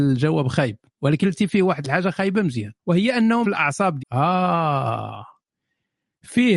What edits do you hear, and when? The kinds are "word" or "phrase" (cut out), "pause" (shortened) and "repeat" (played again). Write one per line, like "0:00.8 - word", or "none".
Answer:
0:01.2 - word
0:02.8 - pause
0:03.4 - phrase
0:04.0 - word

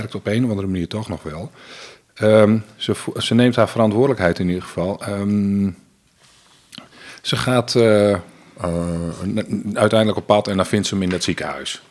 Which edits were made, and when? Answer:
none

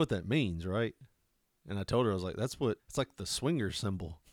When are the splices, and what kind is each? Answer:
0:02.8 - word

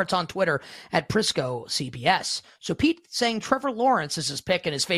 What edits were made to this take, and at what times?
none

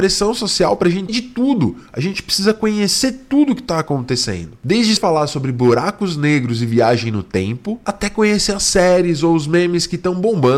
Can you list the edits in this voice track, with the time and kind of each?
0:01.1 - word
0:05.0 - word

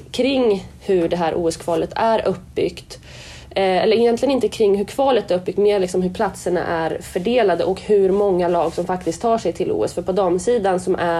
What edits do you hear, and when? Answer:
none

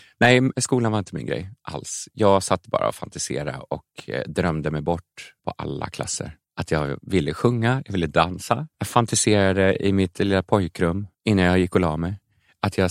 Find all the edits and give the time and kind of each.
0:05.4 - pause
0:06.4 - pause
0:08.7 - pause
0:11.1 - pause

